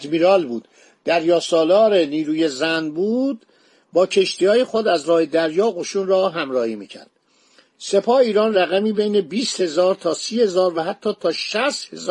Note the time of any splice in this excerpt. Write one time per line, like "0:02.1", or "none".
none